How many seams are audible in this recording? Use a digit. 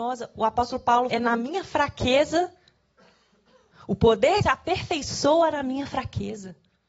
2